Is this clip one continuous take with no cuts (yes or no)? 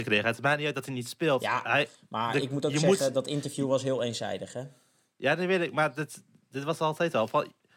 yes